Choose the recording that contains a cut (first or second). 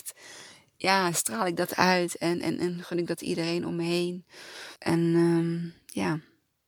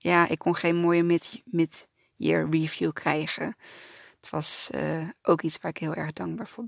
first